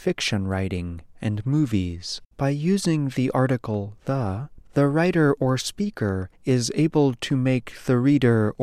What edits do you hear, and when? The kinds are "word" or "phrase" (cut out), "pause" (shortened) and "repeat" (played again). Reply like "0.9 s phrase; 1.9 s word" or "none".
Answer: 2.3 s pause